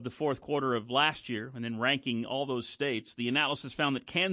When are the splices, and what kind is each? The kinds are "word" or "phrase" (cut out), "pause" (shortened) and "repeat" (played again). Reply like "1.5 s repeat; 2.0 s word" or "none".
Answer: none